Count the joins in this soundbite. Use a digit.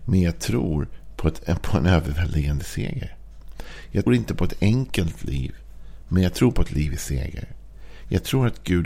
1